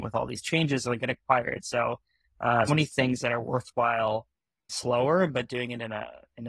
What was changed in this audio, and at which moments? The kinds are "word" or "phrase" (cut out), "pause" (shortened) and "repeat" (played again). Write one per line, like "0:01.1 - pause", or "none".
0:02.7 - word
0:04.7 - word

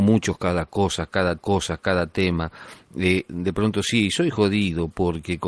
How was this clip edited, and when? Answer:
0:01.4 - repeat
0:03.3 - word

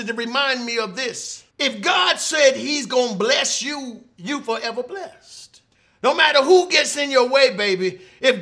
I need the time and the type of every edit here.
0:01.5 - pause
0:05.7 - pause

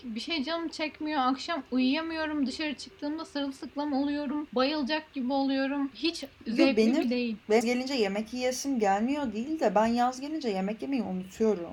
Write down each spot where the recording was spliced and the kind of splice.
0:07.0 - word
0:07.6 - word

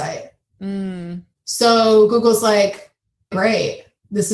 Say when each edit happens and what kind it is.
0:03.3 - word

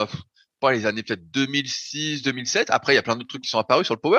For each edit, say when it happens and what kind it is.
none

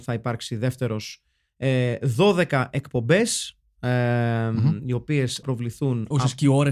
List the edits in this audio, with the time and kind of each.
0:05.4 - word

